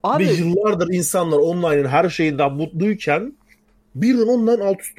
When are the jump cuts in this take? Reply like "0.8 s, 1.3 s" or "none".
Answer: none